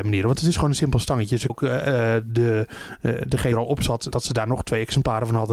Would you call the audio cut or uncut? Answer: cut